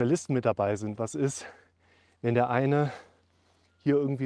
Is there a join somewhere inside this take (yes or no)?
no